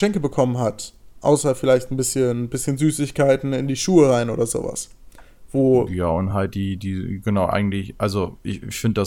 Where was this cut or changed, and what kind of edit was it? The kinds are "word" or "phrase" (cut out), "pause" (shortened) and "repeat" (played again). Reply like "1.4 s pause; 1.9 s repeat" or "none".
none